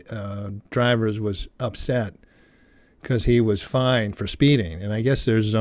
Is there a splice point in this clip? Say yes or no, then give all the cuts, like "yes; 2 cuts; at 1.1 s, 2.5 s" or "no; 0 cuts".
no; 0 cuts